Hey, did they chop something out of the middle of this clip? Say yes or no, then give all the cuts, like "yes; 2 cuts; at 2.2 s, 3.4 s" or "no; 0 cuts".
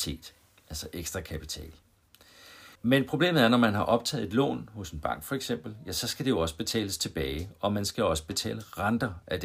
yes; 1 cut; at 2.8 s